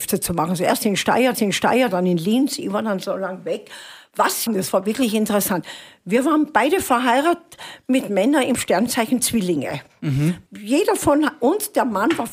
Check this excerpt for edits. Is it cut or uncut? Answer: cut